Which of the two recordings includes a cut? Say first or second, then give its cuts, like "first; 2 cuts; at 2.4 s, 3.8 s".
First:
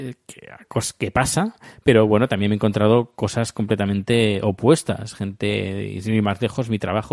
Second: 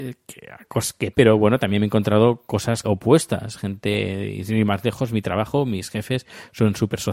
second; 2 cuts; at 1.1 s, 2.8 s